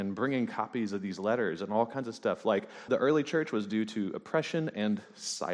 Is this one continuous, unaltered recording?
no; 1 cut; at 2.9 s

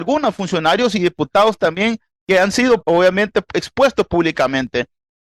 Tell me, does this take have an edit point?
yes; 1 cut; at 2.8 s

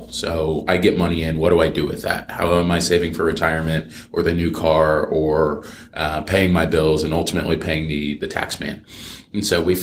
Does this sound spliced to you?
no; 0 cuts

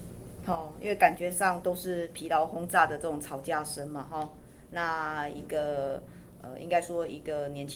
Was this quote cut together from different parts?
no; 0 cuts

